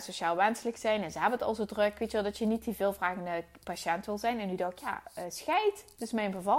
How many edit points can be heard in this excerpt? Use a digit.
0